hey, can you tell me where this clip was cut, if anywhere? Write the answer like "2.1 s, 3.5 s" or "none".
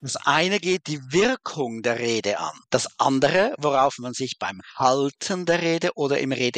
2.6 s